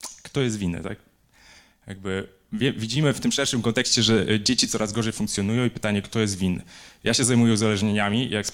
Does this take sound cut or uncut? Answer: uncut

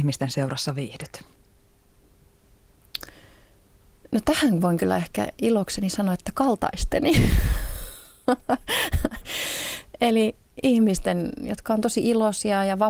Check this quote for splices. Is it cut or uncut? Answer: uncut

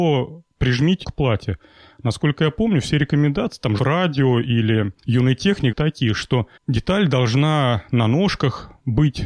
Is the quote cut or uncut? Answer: cut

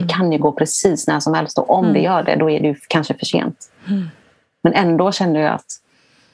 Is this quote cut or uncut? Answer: uncut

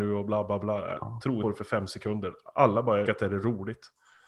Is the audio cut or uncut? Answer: cut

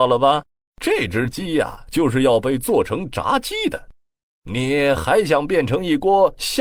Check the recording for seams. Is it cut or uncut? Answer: uncut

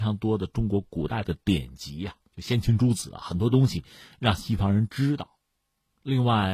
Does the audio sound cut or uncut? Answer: cut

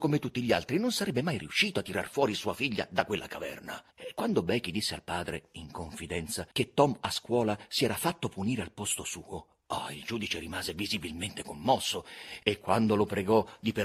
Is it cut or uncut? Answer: cut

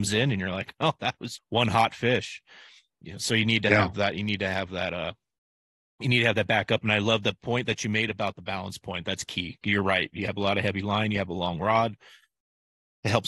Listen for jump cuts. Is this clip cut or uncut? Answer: cut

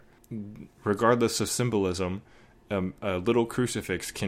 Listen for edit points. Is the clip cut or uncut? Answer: uncut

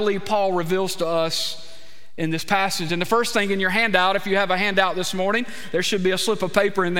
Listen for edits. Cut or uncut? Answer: uncut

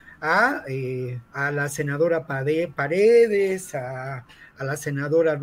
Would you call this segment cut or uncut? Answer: cut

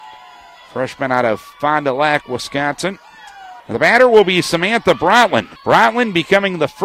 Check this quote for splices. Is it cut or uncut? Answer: cut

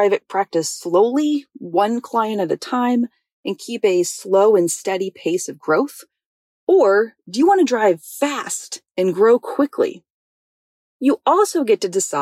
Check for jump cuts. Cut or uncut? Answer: uncut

